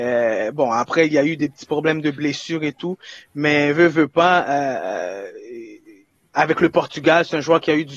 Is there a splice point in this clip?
no; 0 cuts

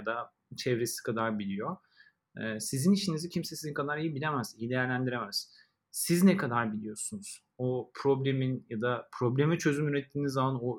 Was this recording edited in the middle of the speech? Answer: no; 0 cuts

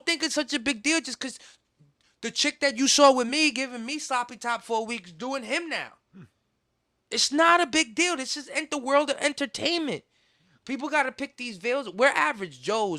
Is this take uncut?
yes; 0 cuts

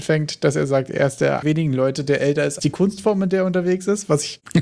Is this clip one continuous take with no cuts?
no; 2 cuts; at 1.4 s, 2.6 s

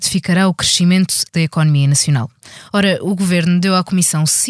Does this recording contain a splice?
yes; 1 cut; at 1.3 s

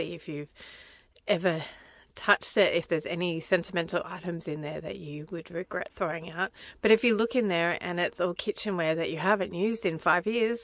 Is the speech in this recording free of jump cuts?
yes; 0 cuts

